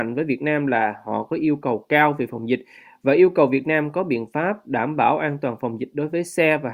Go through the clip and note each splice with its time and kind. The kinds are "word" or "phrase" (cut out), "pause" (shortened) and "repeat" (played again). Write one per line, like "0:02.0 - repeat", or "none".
none